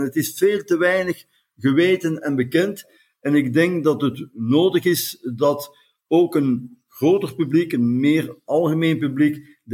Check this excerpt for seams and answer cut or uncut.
uncut